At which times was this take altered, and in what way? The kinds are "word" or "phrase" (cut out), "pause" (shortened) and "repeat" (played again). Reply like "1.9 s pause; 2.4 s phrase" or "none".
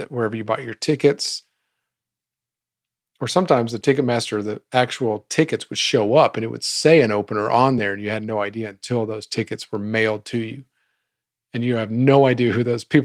none